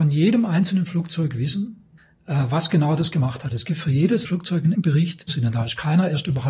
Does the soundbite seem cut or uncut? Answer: cut